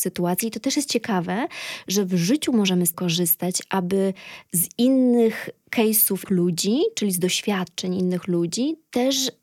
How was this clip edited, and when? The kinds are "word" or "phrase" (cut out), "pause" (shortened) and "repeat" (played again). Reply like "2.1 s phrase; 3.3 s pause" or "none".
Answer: 2.9 s word; 6.3 s word